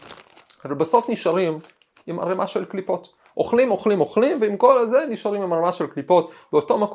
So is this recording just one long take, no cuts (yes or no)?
yes